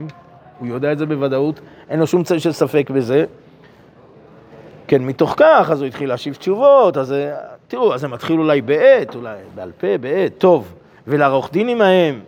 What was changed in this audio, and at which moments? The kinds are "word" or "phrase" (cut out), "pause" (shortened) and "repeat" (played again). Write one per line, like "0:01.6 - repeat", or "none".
none